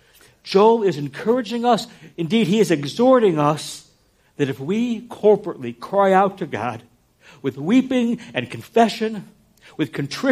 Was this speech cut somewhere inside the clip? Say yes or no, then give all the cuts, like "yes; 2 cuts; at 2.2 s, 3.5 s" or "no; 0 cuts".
no; 0 cuts